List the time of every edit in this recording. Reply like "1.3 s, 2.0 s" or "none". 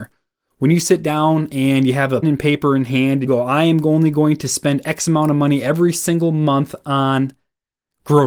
2.2 s, 3.3 s

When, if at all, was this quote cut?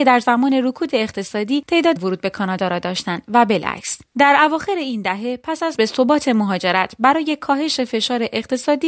2.0 s, 4.1 s, 5.8 s

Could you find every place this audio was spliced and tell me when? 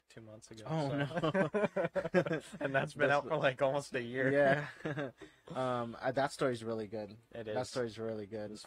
none

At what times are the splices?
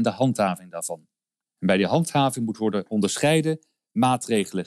none

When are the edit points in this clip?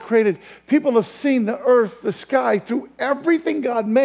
none

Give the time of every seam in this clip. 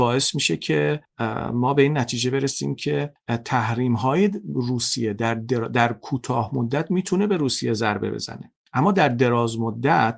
none

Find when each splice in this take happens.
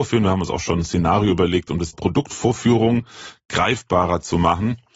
1.9 s

